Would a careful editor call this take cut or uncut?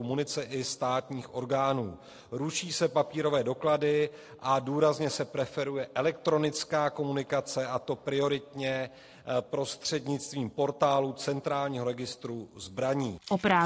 uncut